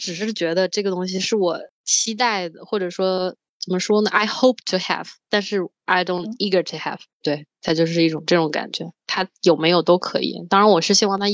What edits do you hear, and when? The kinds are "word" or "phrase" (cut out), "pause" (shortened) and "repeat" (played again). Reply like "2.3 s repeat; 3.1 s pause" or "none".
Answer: none